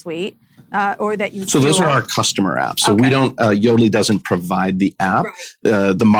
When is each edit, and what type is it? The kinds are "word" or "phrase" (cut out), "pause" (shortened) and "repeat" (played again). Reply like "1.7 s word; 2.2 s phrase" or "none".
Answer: none